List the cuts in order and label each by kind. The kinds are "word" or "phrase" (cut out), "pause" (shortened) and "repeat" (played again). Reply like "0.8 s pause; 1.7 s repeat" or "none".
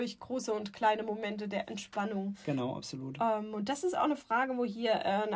none